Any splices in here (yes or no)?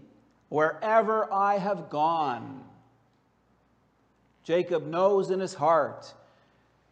no